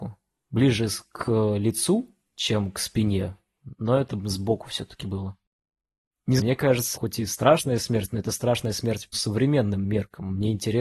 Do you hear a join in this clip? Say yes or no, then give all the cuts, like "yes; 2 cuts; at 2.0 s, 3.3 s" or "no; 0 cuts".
yes; 3 cuts; at 6.4 s, 6.9 s, 9.1 s